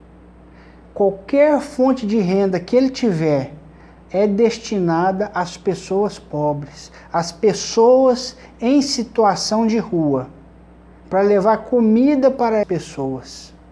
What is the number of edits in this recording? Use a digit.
1